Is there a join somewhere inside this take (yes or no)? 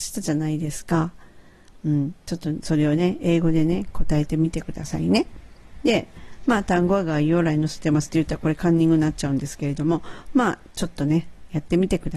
no